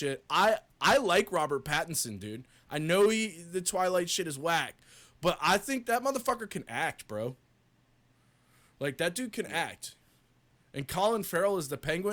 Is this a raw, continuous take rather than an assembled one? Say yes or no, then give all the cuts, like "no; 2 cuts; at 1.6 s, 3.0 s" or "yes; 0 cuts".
yes; 0 cuts